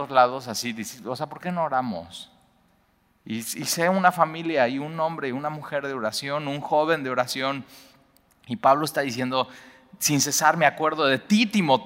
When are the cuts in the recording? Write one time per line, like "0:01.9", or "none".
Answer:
none